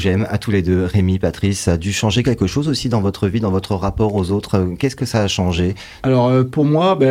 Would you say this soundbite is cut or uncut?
uncut